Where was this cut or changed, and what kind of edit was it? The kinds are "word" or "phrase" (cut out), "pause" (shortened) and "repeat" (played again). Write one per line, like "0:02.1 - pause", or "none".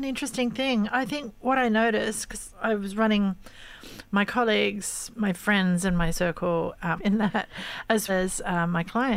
0:02.5 - word
0:06.1 - word
0:07.0 - word
0:08.1 - word

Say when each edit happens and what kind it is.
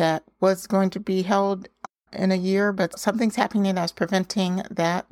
none

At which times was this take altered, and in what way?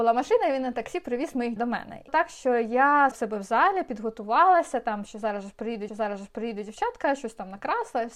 0:01.6 - word
0:02.1 - word
0:03.1 - word
0:05.9 - repeat

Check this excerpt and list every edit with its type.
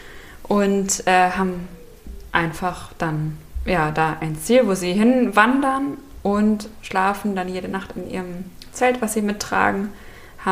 none

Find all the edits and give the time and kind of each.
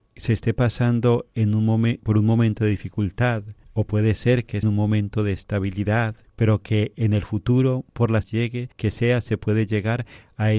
0:02.0 - word
0:03.6 - pause
0:04.6 - phrase
0:06.2 - pause
0:08.2 - phrase
0:08.7 - pause

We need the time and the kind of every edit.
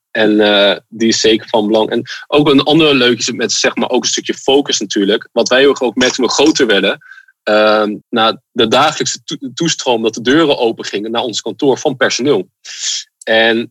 0:08.0 - pause

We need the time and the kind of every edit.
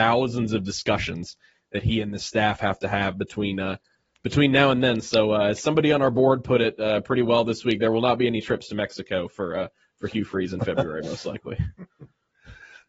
none

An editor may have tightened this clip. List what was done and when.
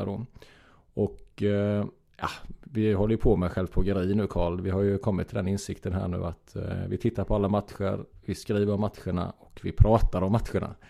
none

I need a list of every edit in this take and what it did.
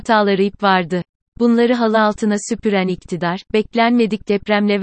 none

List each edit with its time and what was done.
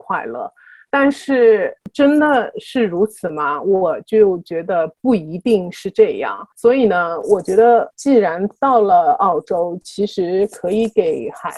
0:05.0 - pause
0:06.5 - pause
0:07.9 - word

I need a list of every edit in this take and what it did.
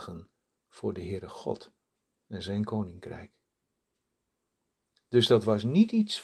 none

